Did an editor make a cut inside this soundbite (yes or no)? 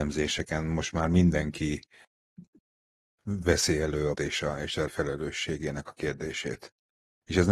yes